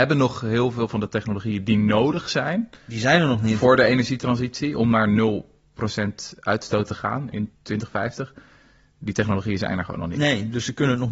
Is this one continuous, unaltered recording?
no; 2 cuts; at 2.8 s, 7.5 s

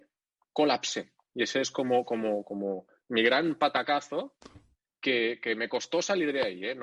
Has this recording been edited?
no; 0 cuts

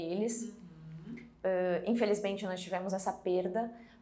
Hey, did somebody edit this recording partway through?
no; 0 cuts

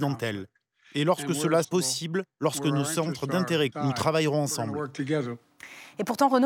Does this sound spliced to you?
yes; 2 cuts; at 1.6 s, 3.7 s

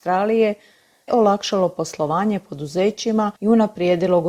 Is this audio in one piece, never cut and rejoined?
no; 2 cuts; at 1.1 s, 3.4 s

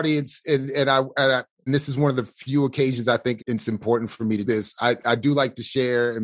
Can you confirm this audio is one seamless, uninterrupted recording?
no; 3 cuts; at 1.7 s, 3.4 s, 4.5 s

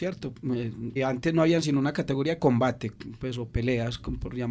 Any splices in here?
yes; 2 cuts; at 1.0 s, 2.4 s

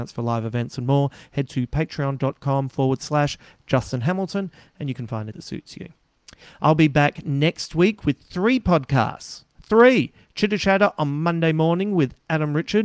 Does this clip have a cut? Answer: yes; 2 cuts; at 5.3 s, 9.5 s

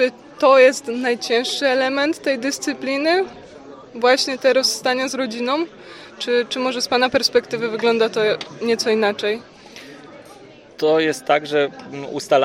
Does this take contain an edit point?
no; 0 cuts

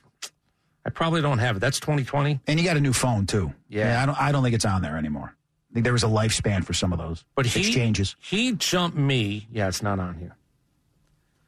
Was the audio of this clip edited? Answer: no; 0 cuts

